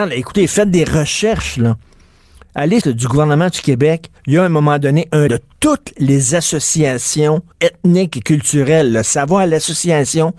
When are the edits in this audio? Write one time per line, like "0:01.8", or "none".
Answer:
0:02.8
0:04.2
0:05.3
0:07.5

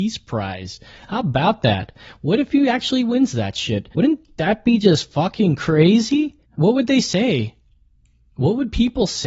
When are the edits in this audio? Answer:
0:03.9
0:06.4

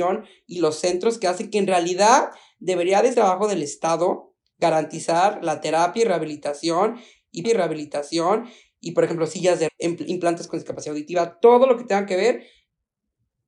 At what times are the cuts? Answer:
0:03.1
0:07.4
0:09.7
0:10.5

